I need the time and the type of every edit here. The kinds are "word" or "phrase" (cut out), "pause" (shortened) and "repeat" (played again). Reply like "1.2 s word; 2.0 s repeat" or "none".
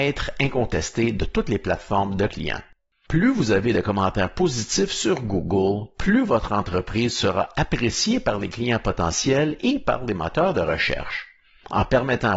2.3 s word